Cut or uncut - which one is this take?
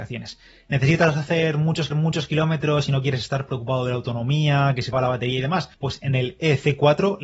cut